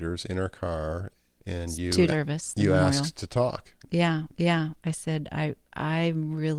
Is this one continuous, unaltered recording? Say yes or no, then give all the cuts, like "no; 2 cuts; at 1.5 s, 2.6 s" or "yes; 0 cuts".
no; 3 cuts; at 1.4 s, 2.1 s, 4.3 s